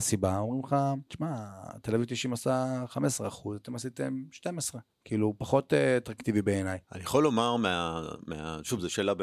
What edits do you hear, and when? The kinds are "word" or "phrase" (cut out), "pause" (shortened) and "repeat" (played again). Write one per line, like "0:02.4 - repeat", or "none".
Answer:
0:01.1 - pause
0:04.9 - pause
0:06.8 - pause

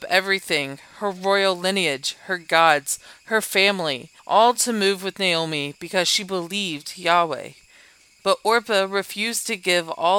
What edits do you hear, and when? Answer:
0:04.2 - pause

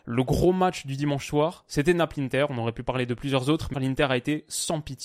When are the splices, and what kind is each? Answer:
0:03.7 - word

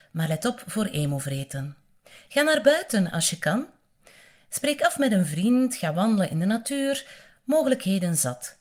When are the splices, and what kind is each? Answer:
none

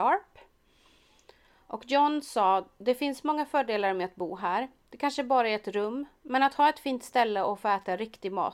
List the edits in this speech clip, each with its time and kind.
none

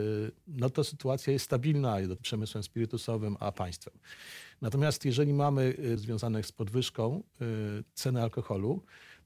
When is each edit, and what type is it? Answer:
0:02.2 - phrase
0:03.4 - word
0:06.0 - phrase

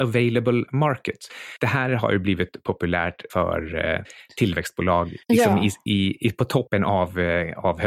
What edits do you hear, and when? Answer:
0:05.2 - pause

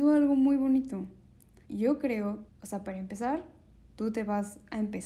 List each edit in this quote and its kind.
0:01.6 - word
0:02.5 - word

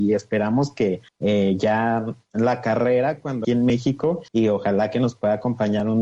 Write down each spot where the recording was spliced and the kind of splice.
0:01.1 - pause
0:03.4 - phrase
0:04.3 - pause

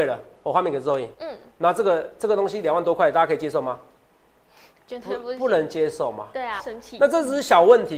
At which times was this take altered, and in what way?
0:01.1 - pause
0:06.6 - word

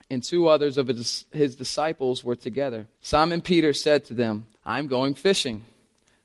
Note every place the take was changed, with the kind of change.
0:02.9 - pause
0:04.5 - pause

